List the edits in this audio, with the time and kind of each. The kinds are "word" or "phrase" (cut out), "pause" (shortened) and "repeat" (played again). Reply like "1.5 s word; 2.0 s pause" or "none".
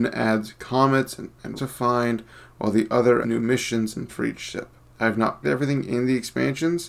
1.6 s word; 3.2 s word; 4.1 s word; 5.4 s word